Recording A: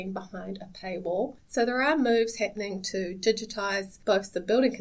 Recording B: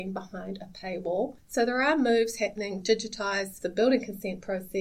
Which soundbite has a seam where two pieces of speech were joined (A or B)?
B